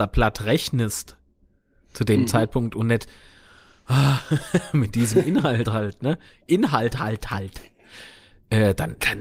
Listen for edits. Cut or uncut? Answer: uncut